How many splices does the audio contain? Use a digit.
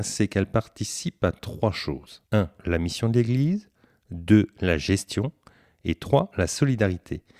1